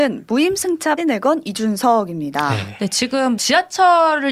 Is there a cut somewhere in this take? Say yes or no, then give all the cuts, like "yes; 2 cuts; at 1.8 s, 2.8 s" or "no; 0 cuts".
yes; 2 cuts; at 1.0 s, 3.4 s